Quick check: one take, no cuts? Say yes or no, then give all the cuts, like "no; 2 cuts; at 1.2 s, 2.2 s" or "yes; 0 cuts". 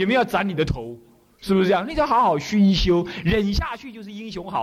yes; 0 cuts